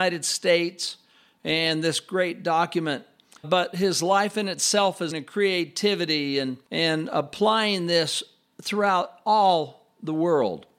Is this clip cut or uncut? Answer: cut